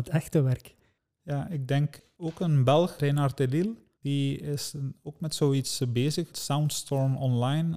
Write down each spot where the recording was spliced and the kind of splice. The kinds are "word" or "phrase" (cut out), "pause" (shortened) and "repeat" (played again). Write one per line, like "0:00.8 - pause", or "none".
none